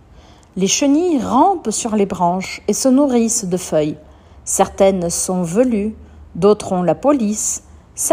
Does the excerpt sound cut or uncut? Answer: uncut